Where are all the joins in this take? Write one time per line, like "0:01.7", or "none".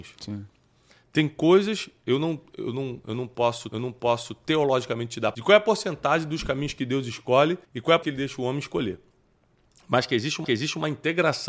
0:03.7
0:05.3
0:07.6
0:08.0
0:10.4